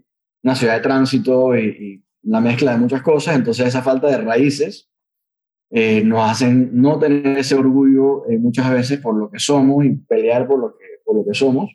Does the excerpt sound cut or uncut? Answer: uncut